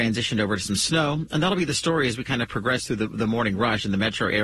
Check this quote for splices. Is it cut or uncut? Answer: uncut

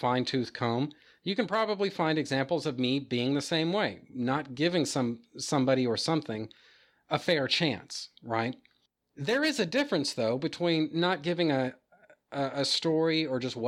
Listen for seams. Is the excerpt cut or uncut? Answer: uncut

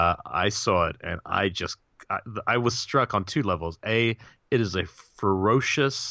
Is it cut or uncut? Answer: uncut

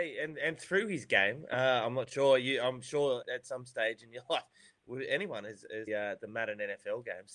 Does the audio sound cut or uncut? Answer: cut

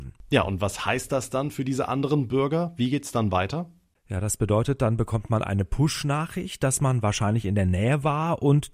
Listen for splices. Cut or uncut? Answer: uncut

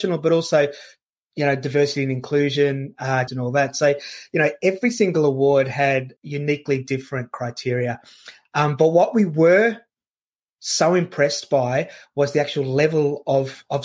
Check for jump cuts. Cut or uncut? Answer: cut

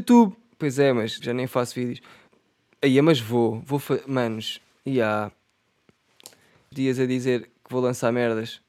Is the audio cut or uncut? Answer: cut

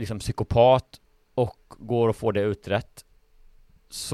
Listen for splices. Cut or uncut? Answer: uncut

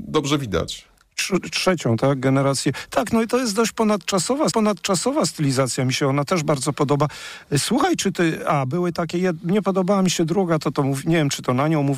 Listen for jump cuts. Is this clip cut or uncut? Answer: cut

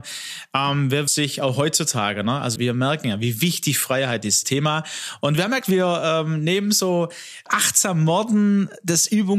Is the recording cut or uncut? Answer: cut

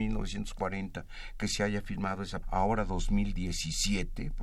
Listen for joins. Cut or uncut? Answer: cut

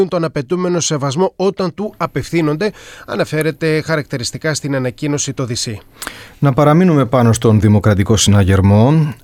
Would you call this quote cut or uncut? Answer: uncut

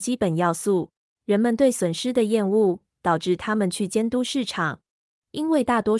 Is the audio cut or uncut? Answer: cut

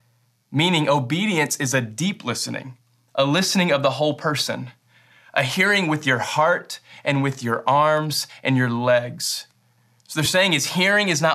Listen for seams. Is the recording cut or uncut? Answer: uncut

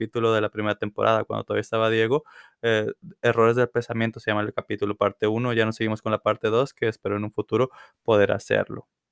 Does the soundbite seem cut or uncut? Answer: uncut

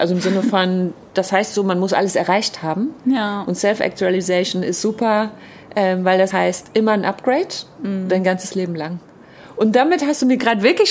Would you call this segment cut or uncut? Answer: cut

